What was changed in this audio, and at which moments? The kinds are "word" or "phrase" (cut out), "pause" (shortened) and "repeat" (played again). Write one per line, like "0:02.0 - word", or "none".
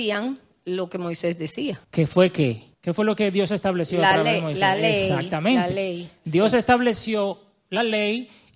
0:01.8 - pause
0:02.7 - pause